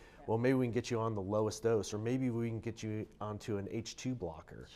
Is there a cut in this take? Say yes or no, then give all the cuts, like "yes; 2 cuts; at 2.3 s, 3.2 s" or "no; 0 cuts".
no; 0 cuts